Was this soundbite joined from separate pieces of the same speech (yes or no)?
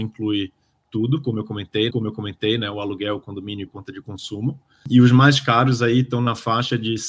yes